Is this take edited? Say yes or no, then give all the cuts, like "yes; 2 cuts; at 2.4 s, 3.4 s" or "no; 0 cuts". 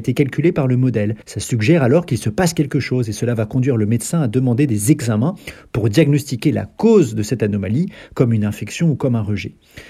yes; 1 cut; at 1.2 s